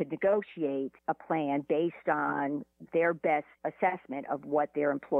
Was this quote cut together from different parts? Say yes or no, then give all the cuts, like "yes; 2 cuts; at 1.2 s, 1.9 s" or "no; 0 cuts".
yes; 2 cuts; at 1.0 s, 3.6 s